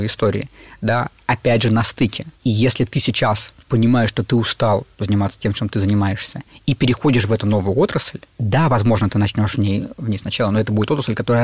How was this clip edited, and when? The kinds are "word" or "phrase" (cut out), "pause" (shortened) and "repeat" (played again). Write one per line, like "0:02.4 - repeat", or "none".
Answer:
none